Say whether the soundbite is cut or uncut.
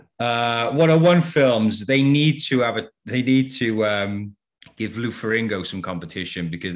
cut